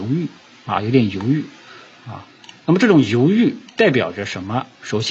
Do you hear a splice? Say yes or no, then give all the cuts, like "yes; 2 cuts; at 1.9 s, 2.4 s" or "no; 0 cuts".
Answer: no; 0 cuts